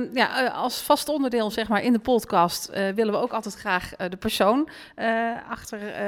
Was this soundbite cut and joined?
no; 0 cuts

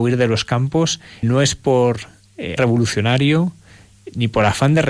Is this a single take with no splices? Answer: no; 2 cuts; at 1.2 s, 2.6 s

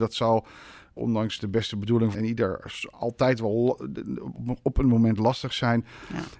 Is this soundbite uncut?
no; 1 cut; at 2.1 s

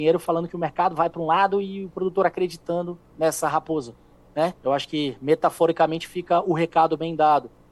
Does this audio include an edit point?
yes; 1 cut; at 4.6 s

